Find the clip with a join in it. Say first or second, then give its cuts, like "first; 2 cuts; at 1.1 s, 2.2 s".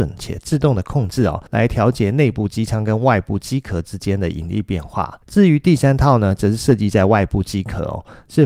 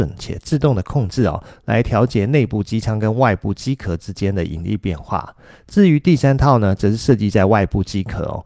first; 2 cuts; at 1.5 s, 5.2 s